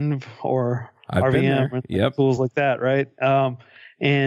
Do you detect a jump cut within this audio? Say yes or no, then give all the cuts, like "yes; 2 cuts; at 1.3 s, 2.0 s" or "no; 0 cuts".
no; 0 cuts